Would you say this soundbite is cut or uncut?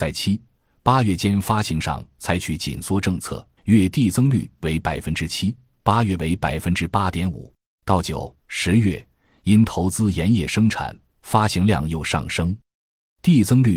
cut